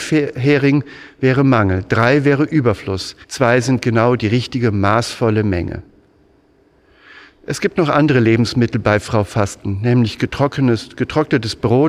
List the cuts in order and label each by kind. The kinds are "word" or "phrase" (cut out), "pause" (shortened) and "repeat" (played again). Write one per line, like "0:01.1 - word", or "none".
0:03.2 - pause

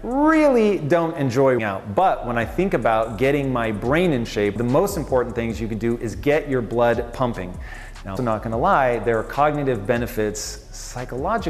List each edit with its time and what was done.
0:01.6 - word
0:04.6 - word
0:08.2 - word

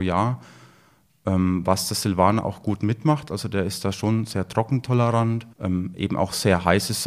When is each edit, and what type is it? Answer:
0:05.5 - pause

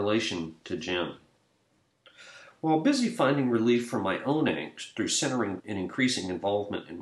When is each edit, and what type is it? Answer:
0:05.6 - word

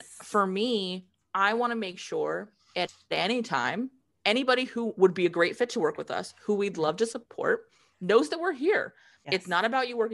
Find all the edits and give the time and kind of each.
none

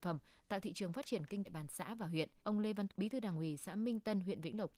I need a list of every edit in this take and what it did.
0:01.4 - phrase
0:02.4 - pause
0:02.9 - word

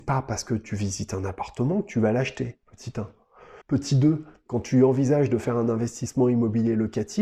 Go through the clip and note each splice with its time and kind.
0:02.6 - pause
0:03.6 - pause

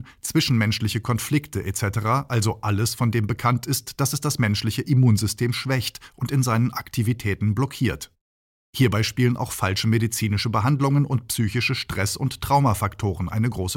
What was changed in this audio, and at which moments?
none

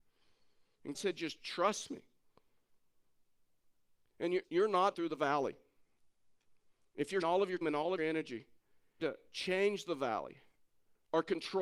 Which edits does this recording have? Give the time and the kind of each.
0:00.9 - word
0:01.4 - word
0:04.4 - word
0:04.9 - word
0:07.2 - word
0:07.6 - word
0:08.0 - word
0:09.0 - word

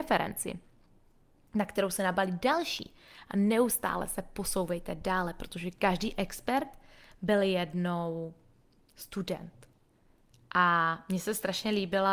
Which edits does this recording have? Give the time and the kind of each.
none

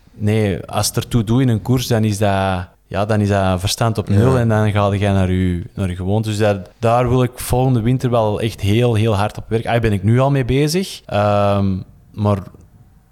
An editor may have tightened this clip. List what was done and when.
0:02.7 - pause
0:06.7 - pause
0:11.0 - pause

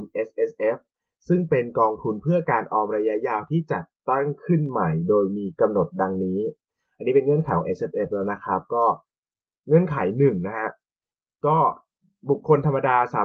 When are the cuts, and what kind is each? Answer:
none

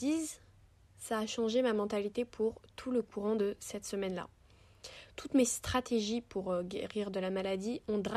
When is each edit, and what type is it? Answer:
none

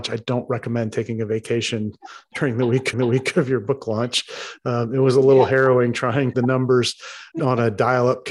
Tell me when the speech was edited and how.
0:02.9 - repeat
0:06.3 - phrase
0:07.3 - pause

